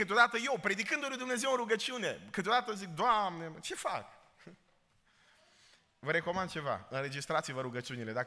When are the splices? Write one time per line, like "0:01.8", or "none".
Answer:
none